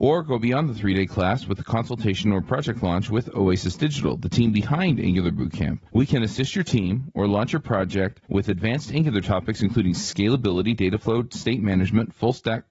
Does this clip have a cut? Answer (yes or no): yes